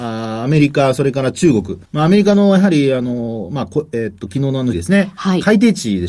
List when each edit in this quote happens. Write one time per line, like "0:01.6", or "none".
0:01.9
0:04.7